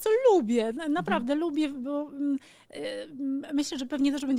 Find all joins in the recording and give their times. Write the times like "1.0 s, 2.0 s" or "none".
none